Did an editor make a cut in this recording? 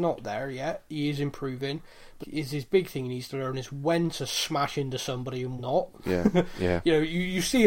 yes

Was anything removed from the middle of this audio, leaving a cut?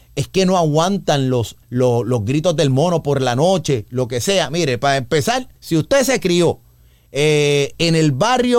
yes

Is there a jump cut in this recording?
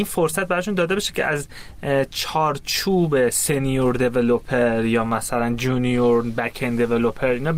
no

